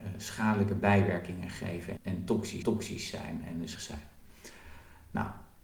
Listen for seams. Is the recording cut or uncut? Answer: cut